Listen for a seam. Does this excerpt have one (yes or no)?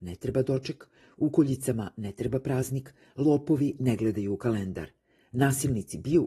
no